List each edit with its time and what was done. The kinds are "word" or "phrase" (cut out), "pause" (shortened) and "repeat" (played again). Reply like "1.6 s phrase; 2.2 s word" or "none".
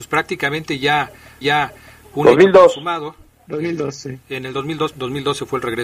1.4 s repeat; 4.2 s pause; 4.9 s word